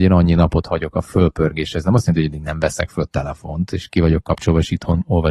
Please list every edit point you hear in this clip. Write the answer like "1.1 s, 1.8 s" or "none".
none